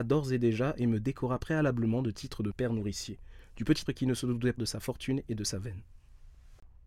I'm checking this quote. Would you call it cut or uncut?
cut